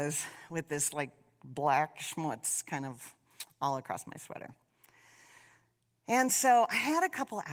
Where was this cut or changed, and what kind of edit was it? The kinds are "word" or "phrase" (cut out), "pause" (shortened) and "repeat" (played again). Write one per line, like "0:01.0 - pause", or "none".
none